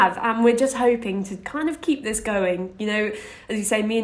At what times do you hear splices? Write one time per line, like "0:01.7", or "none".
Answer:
none